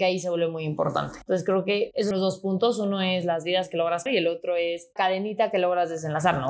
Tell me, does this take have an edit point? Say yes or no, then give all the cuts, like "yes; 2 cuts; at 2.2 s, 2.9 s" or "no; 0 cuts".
yes; 3 cuts; at 2.1 s, 4.1 s, 5.0 s